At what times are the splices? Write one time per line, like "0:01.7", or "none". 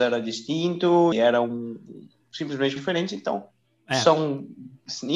0:01.1
0:02.8